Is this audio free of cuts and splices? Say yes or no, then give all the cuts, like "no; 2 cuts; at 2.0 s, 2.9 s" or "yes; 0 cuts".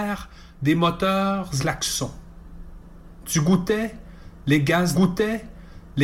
no; 2 cuts; at 1.6 s, 4.9 s